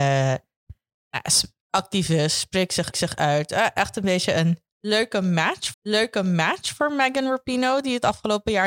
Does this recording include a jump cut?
yes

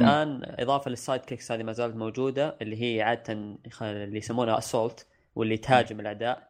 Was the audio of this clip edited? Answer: no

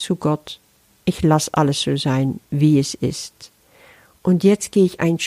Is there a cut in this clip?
no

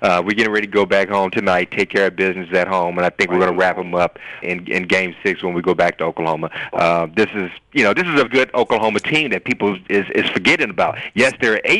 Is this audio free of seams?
no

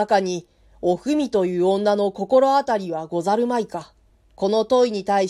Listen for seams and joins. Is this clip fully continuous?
no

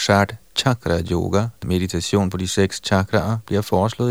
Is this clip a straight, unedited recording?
no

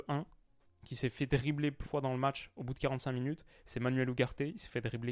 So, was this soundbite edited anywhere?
yes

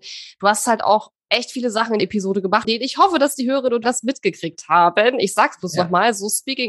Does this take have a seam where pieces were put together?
yes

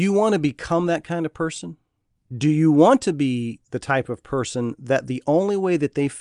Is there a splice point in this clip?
no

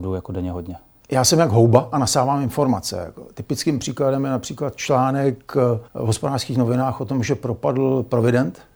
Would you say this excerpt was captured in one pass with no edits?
no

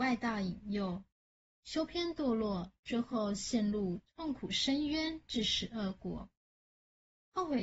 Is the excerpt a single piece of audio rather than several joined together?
yes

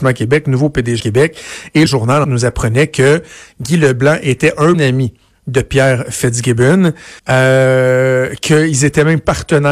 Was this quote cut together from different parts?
yes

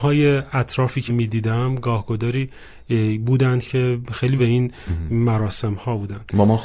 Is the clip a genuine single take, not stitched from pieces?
no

